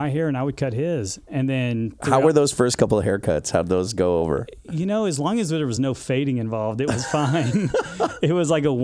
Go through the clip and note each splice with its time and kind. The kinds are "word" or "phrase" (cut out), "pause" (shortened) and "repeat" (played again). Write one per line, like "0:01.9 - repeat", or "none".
none